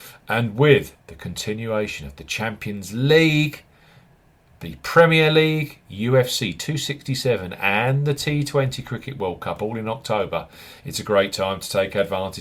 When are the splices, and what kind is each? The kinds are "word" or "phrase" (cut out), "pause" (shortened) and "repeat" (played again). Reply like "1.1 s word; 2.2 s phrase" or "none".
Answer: 1.0 s pause

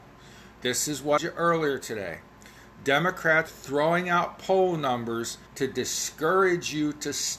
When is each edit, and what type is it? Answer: 1.2 s phrase; 3.5 s word; 5.5 s pause

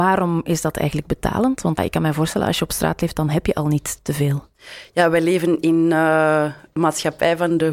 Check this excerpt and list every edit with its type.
1.8 s word; 6.8 s word

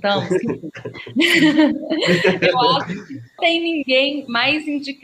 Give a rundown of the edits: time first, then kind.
3.4 s word

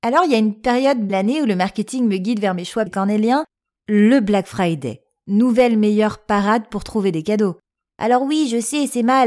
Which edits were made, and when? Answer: 1.1 s phrase; 2.9 s word

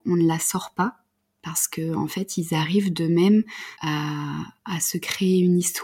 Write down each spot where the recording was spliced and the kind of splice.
3.8 s pause

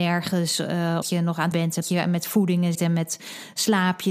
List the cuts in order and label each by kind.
1.0 s word; 1.5 s word; 1.8 s word; 2.7 s word

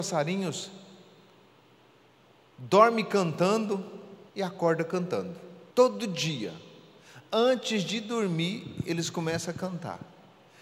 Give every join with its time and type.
4.3 s pause; 5.7 s pause

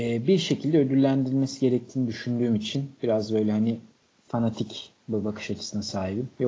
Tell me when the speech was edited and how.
none

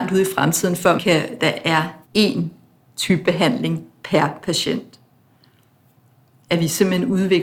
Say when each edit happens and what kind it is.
1.0 s word; 1.4 s phrase; 2.1 s pause

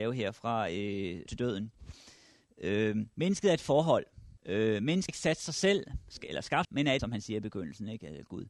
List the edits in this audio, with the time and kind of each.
1.3 s phrase; 3.1 s pause; 4.4 s pause; 5.1 s word; 6.6 s phrase; 7.0 s word

